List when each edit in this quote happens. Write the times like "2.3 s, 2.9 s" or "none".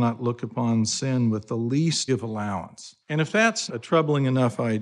2.1 s, 3.0 s, 3.7 s